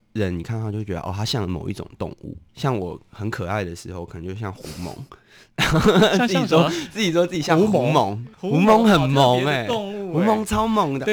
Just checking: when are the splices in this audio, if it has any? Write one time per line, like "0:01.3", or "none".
0:02.5
0:08.3